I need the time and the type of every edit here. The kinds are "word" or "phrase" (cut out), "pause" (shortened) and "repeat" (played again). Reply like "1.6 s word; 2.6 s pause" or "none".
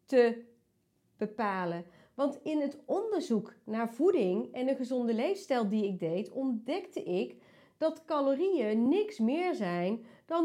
none

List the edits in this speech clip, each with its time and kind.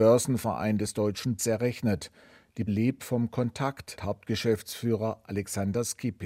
1.4 s word; 2.7 s word; 4.0 s word

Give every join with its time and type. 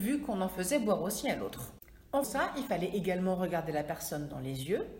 2.2 s word

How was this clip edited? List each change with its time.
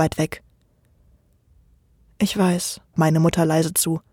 2.9 s word

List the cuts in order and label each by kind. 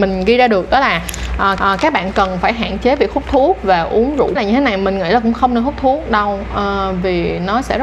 1.6 s repeat; 4.4 s phrase

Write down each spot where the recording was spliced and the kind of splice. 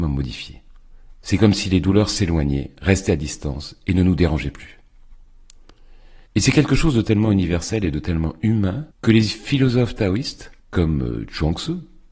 6.3 s pause; 8.9 s pause; 10.6 s pause

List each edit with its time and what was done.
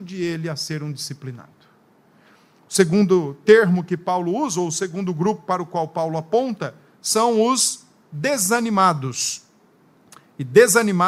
none

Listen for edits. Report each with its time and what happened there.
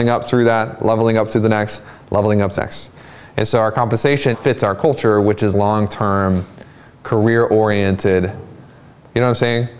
2.6 s word; 4.3 s word; 5.5 s word

